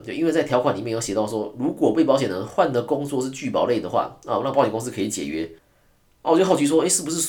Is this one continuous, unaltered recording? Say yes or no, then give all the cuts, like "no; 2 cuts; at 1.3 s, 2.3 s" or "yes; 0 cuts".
yes; 0 cuts